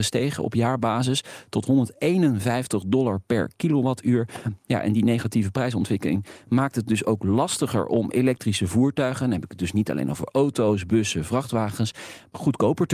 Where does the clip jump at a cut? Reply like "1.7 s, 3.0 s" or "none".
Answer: none

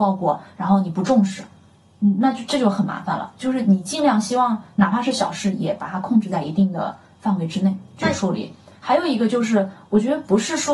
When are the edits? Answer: none

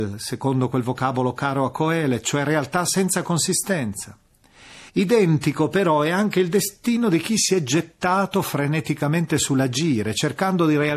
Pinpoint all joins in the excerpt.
4.9 s

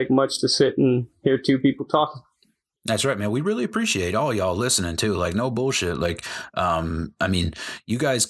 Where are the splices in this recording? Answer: 2.8 s

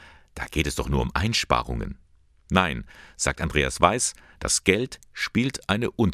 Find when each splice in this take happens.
none

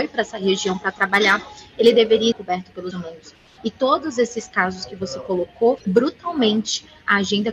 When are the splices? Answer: 2.3 s, 2.9 s, 5.8 s

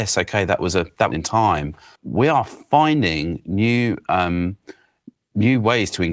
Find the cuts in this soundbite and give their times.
1.1 s, 2.0 s

